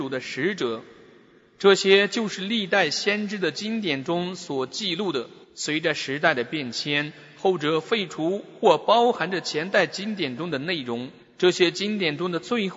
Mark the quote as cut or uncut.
cut